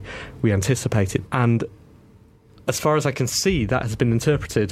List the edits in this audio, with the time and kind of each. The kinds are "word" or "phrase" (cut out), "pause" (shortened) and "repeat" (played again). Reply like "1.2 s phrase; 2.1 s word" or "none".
1.3 s phrase